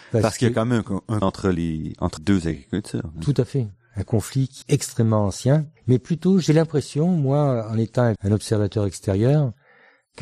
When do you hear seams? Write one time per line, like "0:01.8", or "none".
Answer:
0:01.2
0:02.2
0:04.6
0:05.8
0:08.2